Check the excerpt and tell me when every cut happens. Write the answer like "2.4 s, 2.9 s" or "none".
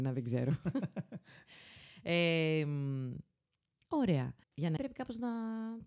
4.4 s, 4.8 s